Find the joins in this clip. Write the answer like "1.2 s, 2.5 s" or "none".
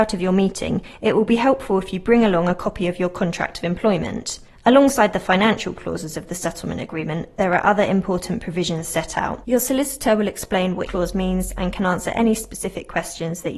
10.9 s